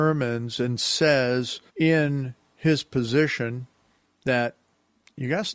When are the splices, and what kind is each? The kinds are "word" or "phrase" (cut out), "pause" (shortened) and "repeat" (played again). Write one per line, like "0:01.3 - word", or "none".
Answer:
0:01.7 - pause